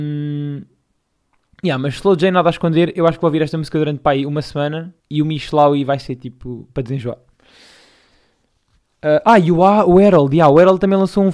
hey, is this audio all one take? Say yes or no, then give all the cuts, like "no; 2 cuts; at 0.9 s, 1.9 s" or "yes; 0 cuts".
no; 1 cut; at 5.0 s